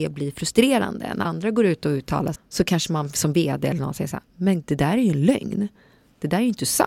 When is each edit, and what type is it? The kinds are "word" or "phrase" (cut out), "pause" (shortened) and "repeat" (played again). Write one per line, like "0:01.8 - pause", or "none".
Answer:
0:01.2 - word
0:02.3 - word
0:04.6 - word

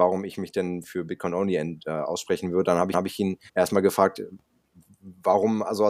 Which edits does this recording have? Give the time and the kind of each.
0:02.9 - repeat
0:03.5 - pause

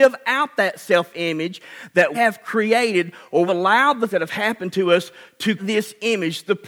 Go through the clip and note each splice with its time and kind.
0:02.1 - word
0:03.5 - word
0:04.1 - word
0:05.6 - word

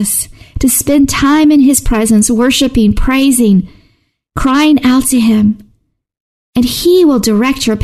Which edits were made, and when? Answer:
none

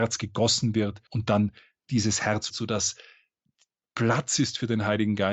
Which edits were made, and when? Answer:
0:01.1 - pause
0:02.5 - word

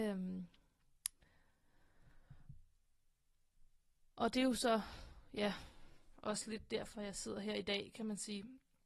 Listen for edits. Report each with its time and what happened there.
none

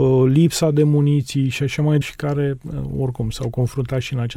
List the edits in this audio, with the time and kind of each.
0:02.0 - word

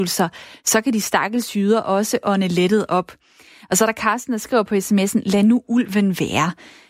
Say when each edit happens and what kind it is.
none

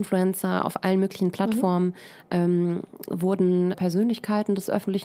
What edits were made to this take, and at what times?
0:03.7 - word

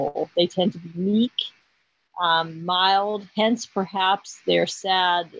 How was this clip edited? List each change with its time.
none

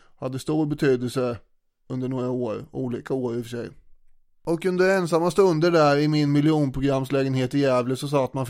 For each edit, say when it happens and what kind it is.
none

